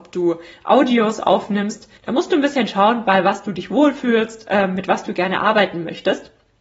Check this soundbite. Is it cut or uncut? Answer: cut